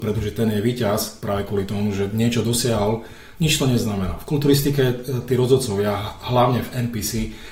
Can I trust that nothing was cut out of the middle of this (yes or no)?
yes